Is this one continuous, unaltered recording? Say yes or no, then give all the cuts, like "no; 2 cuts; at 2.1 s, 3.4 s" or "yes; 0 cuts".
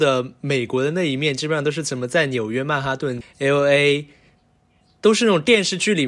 no; 1 cut; at 3.2 s